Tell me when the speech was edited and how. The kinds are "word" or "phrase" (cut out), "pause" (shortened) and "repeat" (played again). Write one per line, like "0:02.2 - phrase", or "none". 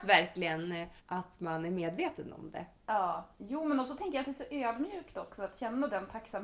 0:01.0 - pause